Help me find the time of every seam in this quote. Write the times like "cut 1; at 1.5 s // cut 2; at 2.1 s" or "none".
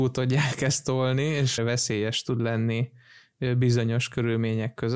cut 1; at 1.6 s